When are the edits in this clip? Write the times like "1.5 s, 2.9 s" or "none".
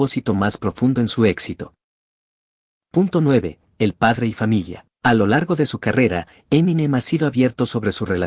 4.9 s